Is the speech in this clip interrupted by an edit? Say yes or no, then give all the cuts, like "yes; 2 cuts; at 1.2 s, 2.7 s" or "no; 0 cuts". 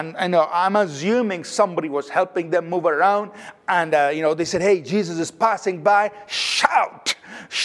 no; 0 cuts